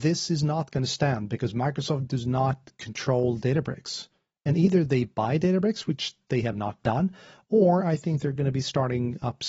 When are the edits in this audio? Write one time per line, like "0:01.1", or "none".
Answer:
none